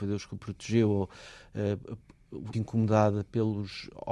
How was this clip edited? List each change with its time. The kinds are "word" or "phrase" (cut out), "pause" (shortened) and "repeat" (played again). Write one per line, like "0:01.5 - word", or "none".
0:02.5 - word